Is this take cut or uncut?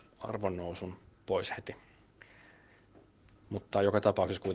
uncut